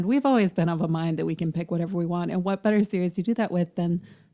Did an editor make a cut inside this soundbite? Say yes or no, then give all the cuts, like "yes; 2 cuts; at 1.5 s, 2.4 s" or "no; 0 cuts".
no; 0 cuts